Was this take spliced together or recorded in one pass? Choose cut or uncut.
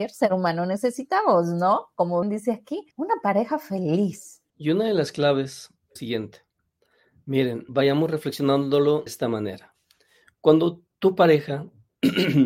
cut